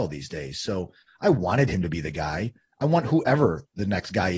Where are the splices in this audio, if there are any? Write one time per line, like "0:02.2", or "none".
none